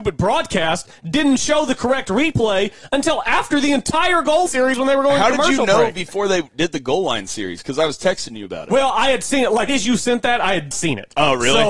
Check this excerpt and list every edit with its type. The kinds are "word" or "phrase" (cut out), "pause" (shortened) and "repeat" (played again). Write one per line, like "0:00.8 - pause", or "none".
0:04.5 - word
0:09.7 - word
0:10.7 - word